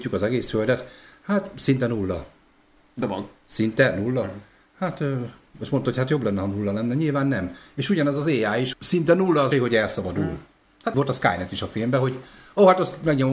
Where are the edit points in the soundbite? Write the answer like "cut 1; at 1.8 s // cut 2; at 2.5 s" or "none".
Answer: cut 1; at 8.7 s // cut 2; at 9.5 s // cut 3; at 10.9 s